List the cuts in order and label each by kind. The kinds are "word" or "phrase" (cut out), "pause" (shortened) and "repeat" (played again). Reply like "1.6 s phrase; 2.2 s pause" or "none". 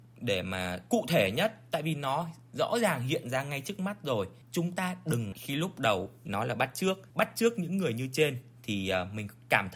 4.4 s pause; 5.3 s word; 6.3 s phrase; 7.1 s pause